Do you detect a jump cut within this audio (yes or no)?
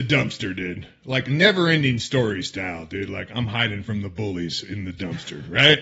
no